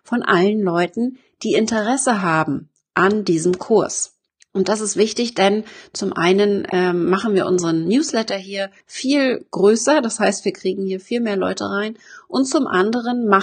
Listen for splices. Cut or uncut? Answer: cut